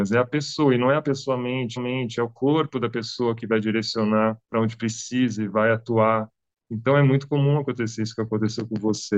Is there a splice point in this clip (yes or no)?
yes